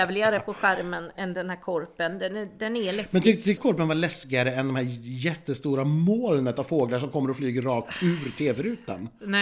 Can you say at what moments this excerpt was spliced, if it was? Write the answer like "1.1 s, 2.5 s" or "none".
1.1 s, 3.6 s